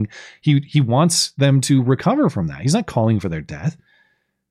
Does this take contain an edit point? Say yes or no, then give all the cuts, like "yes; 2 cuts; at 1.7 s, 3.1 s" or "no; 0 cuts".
no; 0 cuts